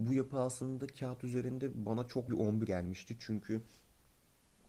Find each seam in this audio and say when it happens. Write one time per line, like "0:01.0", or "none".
0:02.3
0:02.7